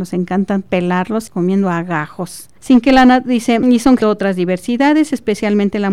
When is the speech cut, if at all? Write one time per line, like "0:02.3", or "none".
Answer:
0:01.3
0:02.6
0:03.6
0:04.0